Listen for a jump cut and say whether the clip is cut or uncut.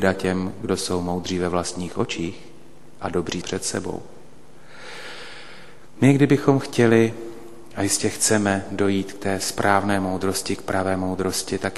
cut